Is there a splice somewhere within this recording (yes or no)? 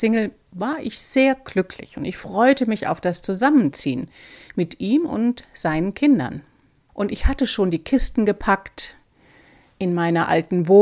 no